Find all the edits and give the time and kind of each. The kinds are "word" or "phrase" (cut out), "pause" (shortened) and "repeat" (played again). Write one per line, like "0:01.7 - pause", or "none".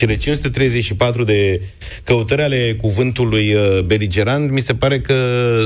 none